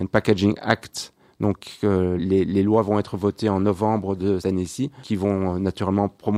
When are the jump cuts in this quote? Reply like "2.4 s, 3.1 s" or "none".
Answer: 2.2 s, 4.4 s, 5.0 s